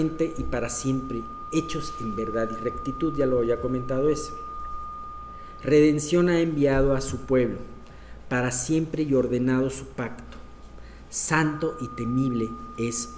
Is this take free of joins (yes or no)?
yes